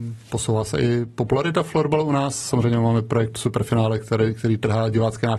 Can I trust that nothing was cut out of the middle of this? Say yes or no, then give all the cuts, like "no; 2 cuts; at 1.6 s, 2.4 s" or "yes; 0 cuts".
yes; 0 cuts